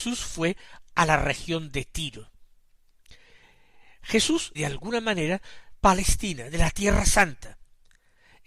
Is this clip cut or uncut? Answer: cut